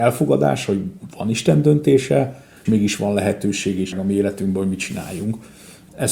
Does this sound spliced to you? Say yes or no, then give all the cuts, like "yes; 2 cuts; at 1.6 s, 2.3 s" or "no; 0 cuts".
yes; 2 cuts; at 2.7 s, 3.9 s